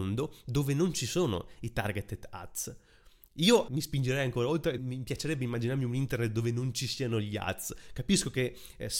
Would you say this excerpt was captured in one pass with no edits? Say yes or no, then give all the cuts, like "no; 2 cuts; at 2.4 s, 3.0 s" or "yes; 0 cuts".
no; 2 cuts; at 3.7 s, 4.8 s